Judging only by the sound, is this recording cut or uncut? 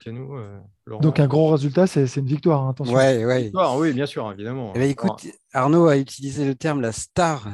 uncut